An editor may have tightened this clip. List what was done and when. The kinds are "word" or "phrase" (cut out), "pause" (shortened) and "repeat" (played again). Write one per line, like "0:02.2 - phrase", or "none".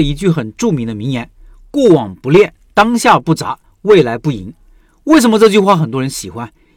none

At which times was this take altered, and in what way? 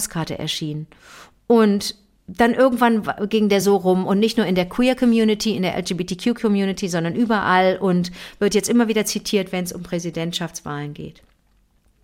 none

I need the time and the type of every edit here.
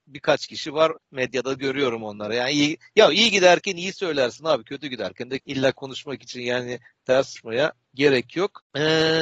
0:01.0 - pause
0:05.4 - phrase

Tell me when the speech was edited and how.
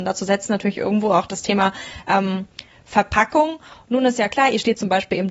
none

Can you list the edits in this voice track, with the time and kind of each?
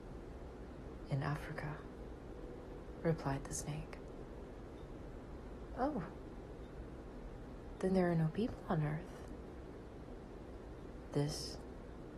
none

